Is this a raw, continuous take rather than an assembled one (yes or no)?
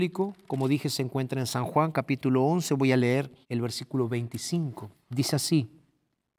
no